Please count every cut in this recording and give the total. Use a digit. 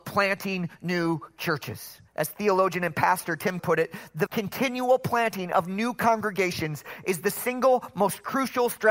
3